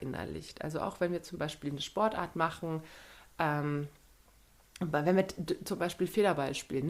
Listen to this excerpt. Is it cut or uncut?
uncut